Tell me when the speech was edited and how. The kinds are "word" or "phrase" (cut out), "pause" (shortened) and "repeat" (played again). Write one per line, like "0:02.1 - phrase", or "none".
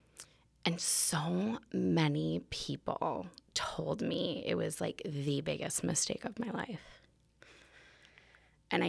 none